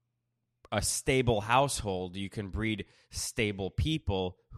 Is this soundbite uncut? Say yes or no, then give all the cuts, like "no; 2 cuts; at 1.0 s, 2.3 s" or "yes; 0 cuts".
yes; 0 cuts